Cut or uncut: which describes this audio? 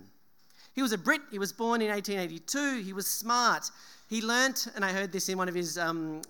uncut